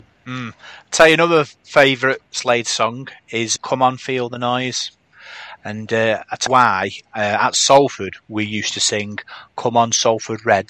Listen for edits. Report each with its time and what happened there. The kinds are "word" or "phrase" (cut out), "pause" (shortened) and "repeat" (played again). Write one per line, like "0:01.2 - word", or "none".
0:03.6 - word
0:06.5 - word